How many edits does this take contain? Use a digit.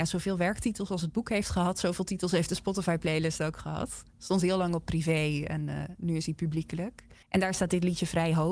1